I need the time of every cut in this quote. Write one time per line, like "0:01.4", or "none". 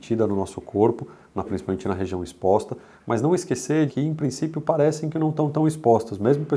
0:01.4
0:03.9